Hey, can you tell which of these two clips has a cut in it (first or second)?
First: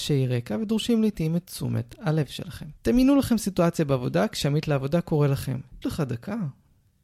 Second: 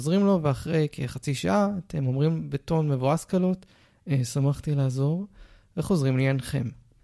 first